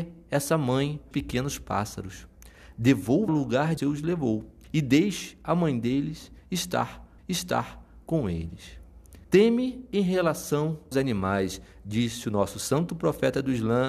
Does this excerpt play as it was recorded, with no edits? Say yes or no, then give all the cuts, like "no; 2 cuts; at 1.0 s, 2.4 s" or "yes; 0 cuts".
no; 7 cuts; at 1.1 s, 3.3 s, 3.8 s, 4.6 s, 7.2 s, 9.2 s, 10.9 s